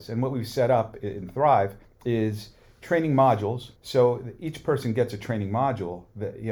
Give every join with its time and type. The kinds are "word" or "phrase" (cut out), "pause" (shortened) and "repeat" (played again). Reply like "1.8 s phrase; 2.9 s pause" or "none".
1.8 s pause; 3.8 s pause